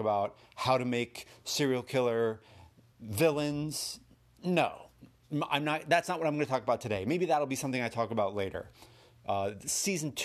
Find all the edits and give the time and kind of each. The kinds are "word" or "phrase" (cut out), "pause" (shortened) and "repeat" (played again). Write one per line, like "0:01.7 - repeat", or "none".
none